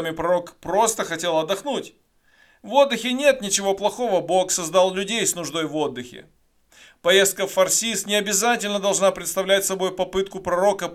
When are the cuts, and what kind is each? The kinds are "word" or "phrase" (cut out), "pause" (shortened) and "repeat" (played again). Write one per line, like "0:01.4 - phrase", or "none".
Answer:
none